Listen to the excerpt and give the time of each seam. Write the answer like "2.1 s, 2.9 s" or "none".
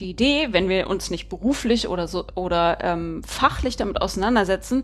none